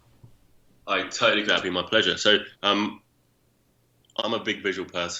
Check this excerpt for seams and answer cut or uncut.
cut